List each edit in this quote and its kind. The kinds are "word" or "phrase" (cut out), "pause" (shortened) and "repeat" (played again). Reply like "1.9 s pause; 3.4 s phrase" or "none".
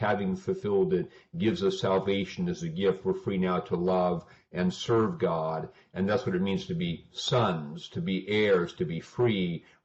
none